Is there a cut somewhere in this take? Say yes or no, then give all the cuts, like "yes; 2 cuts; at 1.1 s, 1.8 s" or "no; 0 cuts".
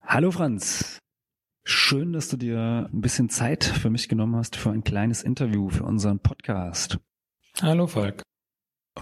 no; 0 cuts